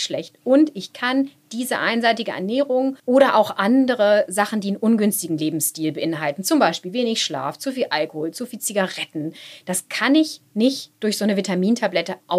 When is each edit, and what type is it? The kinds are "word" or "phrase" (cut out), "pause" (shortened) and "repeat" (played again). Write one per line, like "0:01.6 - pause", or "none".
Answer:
0:03.0 - pause